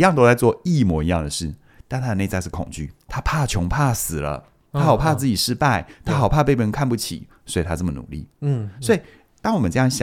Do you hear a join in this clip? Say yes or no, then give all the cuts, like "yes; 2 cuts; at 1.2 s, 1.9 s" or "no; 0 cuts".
yes; 1 cut; at 3.1 s